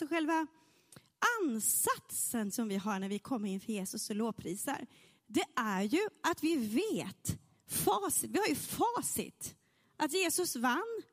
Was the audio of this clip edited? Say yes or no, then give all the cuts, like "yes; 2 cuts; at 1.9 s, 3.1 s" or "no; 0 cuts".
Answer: no; 0 cuts